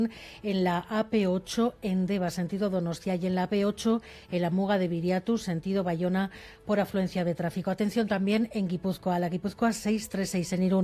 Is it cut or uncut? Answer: uncut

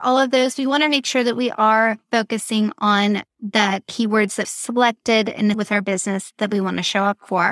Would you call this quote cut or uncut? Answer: cut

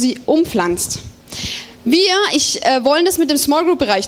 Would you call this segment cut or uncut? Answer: cut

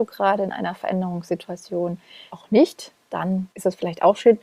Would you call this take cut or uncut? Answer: cut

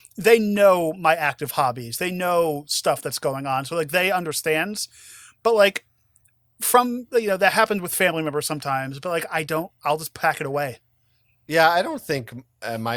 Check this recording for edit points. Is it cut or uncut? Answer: uncut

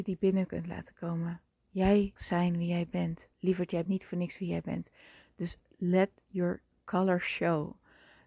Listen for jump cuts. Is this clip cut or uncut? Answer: cut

